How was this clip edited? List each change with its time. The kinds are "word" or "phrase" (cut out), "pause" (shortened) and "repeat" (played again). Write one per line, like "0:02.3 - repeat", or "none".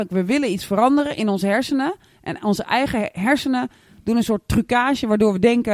none